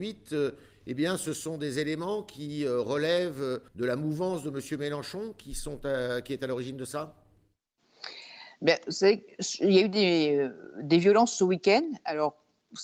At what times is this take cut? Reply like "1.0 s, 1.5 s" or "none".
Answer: 3.7 s

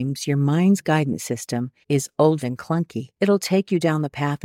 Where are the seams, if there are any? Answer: 1.8 s, 2.4 s, 3.1 s

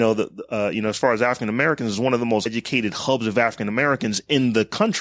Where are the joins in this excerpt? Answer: 2.5 s

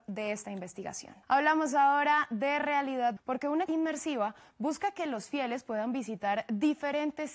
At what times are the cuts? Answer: 1.2 s, 3.2 s, 3.7 s

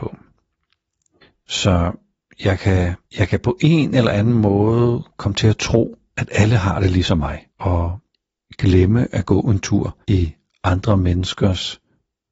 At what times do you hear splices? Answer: 3.1 s, 7.5 s, 10.0 s

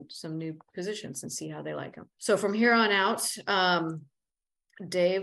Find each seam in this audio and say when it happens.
2.1 s

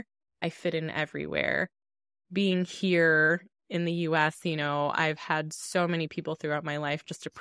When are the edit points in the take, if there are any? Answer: none

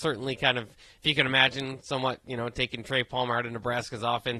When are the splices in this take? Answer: none

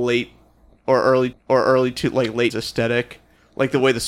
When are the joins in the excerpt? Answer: 1.3 s, 2.5 s

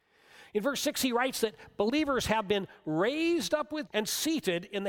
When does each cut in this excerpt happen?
3.9 s

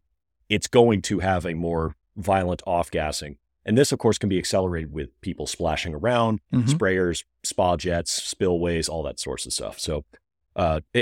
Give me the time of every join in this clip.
none

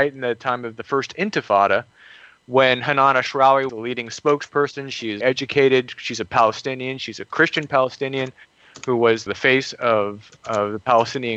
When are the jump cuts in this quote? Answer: 3.7 s, 5.2 s, 9.3 s, 10.4 s

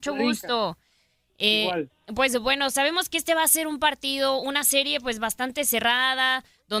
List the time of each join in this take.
none

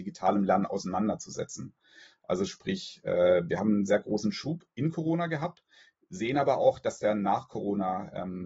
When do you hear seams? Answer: none

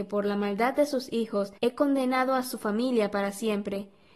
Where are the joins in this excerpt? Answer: 1.6 s

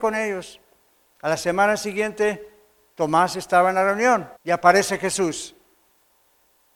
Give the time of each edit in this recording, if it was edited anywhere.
4.4 s

